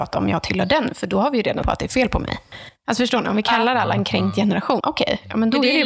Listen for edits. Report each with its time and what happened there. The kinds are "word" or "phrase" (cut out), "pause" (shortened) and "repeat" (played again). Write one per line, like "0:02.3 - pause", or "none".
0:01.6 - phrase
0:04.8 - word

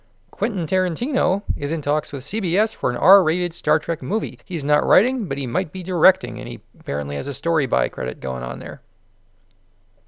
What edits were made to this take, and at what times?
0:04.4 - pause

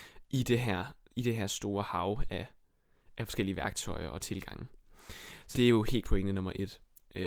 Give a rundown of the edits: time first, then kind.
0:05.5 - word
0:06.0 - word

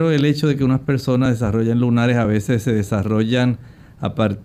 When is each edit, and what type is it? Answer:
none

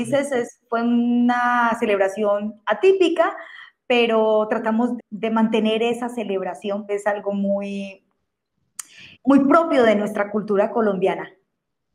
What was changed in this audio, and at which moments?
0:05.0 - word
0:06.9 - phrase
0:09.1 - pause

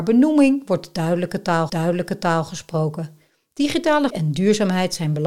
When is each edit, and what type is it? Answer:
0:01.7 - repeat
0:04.1 - word

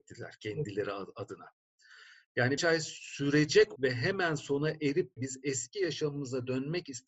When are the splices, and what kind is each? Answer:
0:02.6 - word
0:03.8 - word
0:05.2 - word

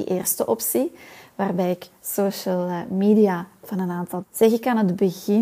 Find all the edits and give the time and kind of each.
0:04.2 - phrase

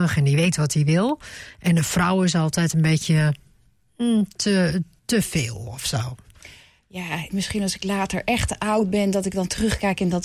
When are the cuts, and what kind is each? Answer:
0:05.0 - word
0:07.3 - word

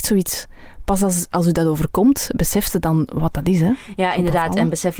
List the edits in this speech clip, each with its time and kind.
none

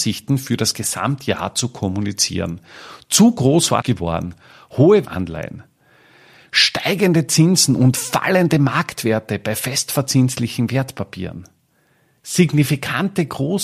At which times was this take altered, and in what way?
0:03.8 - phrase
0:05.0 - phrase

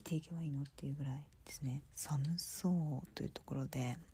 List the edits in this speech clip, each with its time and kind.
0:01.9 - pause

